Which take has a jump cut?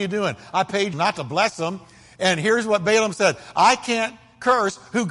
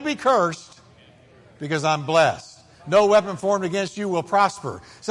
first; 1 cut; at 0.9 s

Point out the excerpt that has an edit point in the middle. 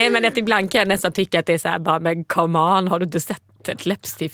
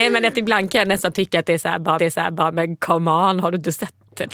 second; 1 cut; at 2.0 s

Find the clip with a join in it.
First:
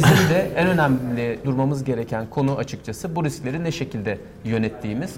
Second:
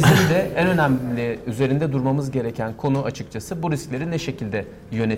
first; 1 cut; at 1.4 s

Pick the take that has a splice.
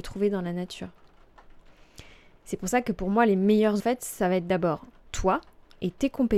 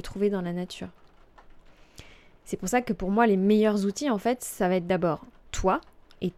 first; 1 cut; at 3.8 s

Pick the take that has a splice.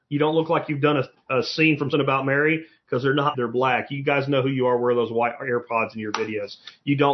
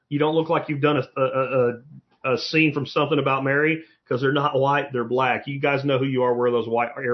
first; 3 cuts; at 1.1 s, 1.9 s, 3.3 s

